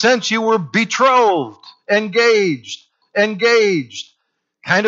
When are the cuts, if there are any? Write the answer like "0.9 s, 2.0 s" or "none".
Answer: 3.0 s

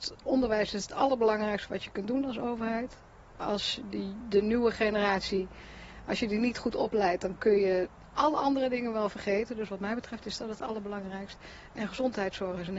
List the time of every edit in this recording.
4.2 s

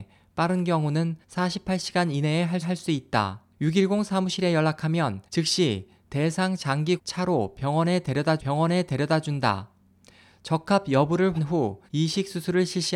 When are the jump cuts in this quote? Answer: 1.2 s, 2.6 s, 3.5 s, 5.3 s, 7.0 s, 8.4 s, 11.4 s, 11.9 s

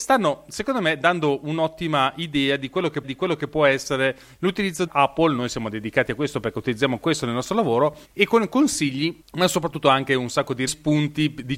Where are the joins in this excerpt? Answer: 3.0 s, 4.9 s, 8.0 s, 10.7 s

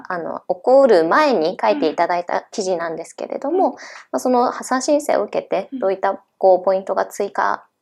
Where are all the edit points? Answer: none

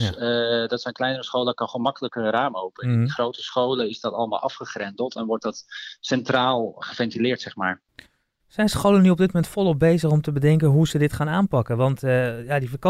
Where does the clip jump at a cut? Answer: none

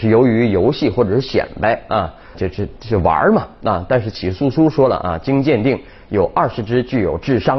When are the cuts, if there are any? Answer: 2.3 s

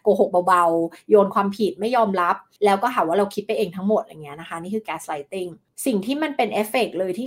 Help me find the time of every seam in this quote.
none

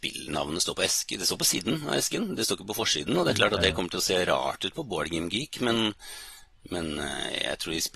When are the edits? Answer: none

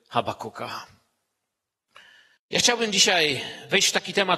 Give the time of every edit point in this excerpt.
none

